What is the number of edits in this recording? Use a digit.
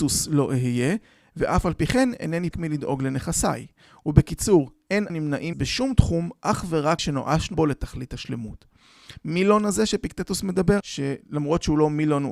6